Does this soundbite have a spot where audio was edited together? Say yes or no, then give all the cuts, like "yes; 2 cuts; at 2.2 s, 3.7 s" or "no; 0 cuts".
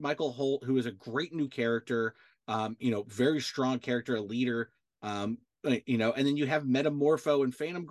no; 0 cuts